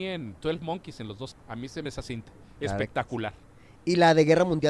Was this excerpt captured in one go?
no; 2 cuts; at 1.3 s, 1.9 s

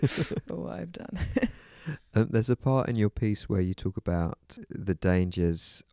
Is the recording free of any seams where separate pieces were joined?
yes; 0 cuts

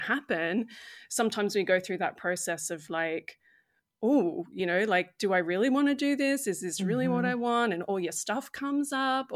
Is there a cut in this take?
no; 0 cuts

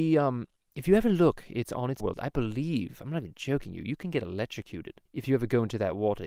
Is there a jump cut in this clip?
yes; 2 cuts; at 2.0 s, 5.1 s

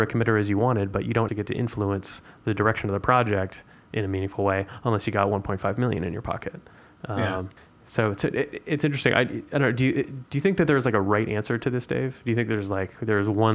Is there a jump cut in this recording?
yes; 2 cuts; at 1.3 s, 7.6 s

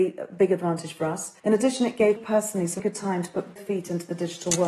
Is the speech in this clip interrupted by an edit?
yes; 4 cuts; at 1.4 s, 2.2 s, 2.8 s, 3.6 s

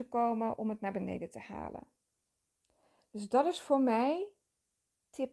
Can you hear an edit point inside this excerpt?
no; 0 cuts

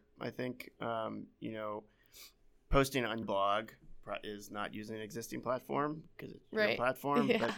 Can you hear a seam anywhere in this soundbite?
yes; 1 cut; at 3.2 s

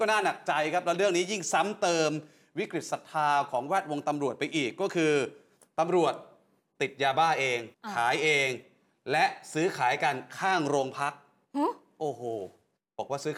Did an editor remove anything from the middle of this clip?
yes; 1 cut; at 7.7 s

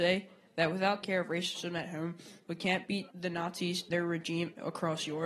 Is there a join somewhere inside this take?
yes; 3 cuts; at 1.0 s, 3.1 s, 3.9 s

